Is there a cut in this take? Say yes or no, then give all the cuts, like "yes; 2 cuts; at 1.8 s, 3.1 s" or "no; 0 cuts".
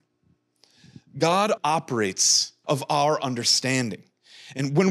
yes; 2 cuts; at 1.6 s, 2.6 s